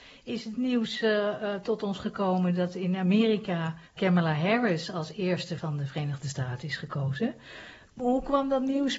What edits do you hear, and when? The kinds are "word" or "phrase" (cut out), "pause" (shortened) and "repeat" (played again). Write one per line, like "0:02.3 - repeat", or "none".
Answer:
0:03.9 - pause
0:05.6 - phrase